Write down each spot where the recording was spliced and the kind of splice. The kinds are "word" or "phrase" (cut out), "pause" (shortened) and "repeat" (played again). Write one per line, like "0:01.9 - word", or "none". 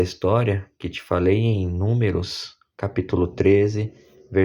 none